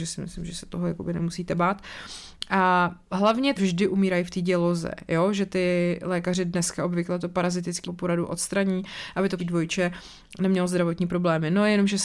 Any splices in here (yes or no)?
yes